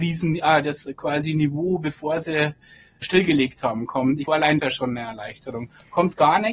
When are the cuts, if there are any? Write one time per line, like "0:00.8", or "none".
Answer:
0:03.0
0:04.3
0:04.6